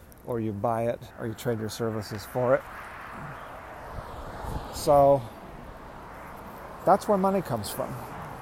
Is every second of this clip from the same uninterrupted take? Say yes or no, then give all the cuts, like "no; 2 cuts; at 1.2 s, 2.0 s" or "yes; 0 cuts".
no; 1 cut; at 1.1 s